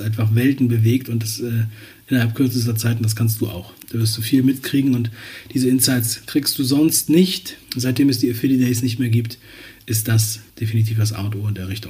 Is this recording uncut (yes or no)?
no